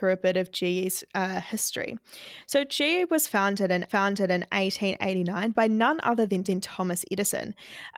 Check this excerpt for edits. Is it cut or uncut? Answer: cut